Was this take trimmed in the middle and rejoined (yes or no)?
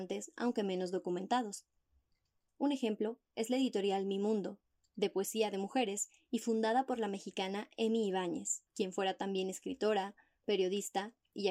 yes